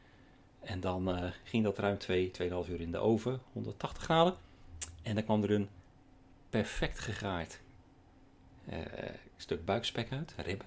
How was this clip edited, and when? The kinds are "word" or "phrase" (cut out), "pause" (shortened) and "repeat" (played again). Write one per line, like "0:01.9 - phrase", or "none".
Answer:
none

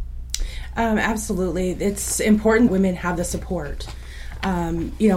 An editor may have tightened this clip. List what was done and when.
0:02.7 - word

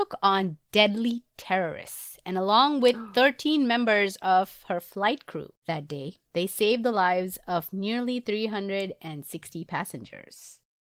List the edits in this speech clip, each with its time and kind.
none

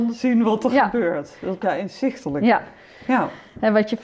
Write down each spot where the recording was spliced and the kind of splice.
0:01.6 - word

